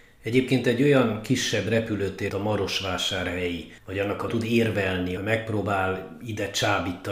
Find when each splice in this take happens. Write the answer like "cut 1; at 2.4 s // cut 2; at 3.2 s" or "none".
cut 1; at 2.3 s // cut 2; at 3.8 s // cut 3; at 4.3 s // cut 4; at 5.2 s